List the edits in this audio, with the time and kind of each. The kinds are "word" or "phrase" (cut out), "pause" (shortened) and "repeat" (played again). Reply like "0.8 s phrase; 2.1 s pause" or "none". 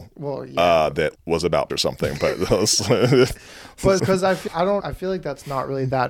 1.1 s word; 1.7 s word; 4.0 s word; 4.5 s word; 4.8 s word